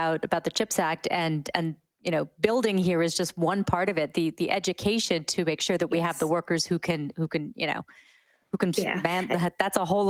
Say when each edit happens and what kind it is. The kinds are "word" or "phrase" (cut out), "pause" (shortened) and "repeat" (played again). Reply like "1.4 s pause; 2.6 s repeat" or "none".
none